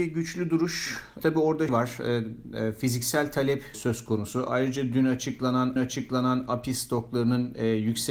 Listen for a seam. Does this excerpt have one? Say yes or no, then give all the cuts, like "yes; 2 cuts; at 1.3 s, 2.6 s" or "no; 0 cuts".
yes; 4 cuts; at 1.2 s, 1.7 s, 3.7 s, 5.8 s